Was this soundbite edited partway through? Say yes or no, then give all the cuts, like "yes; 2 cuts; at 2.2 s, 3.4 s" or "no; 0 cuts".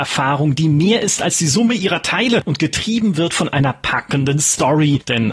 no; 0 cuts